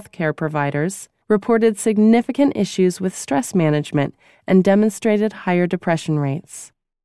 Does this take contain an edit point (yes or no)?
no